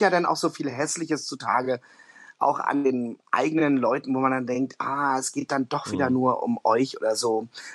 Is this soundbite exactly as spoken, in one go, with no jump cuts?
yes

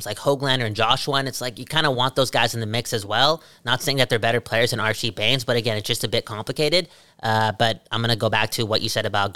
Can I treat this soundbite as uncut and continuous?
yes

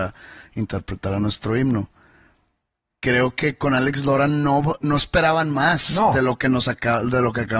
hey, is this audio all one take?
yes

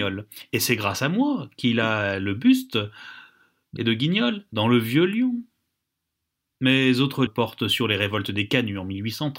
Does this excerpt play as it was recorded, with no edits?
no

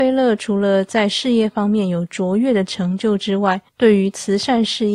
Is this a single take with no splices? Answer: no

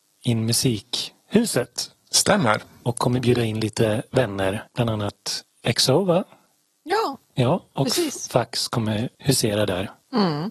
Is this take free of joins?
no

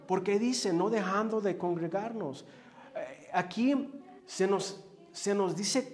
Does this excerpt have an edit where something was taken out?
yes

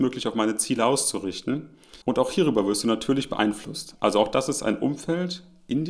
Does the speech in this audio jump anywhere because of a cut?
yes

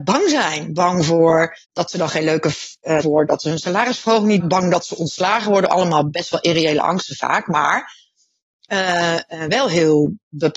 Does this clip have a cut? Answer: yes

